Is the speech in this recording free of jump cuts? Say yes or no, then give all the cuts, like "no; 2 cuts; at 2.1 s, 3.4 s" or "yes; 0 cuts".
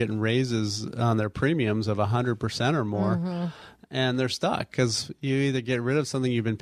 yes; 0 cuts